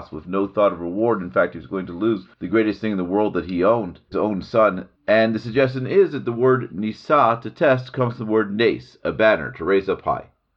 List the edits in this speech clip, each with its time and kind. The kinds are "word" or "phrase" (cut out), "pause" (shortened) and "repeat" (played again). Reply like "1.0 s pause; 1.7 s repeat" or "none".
4.1 s word; 5.0 s pause